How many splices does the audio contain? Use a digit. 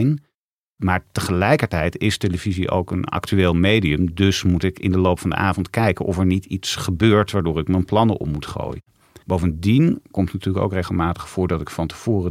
1